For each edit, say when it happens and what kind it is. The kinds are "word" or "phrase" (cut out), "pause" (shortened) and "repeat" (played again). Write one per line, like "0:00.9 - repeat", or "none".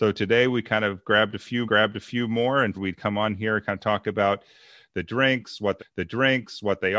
0:01.7 - repeat
0:02.7 - word
0:05.8 - repeat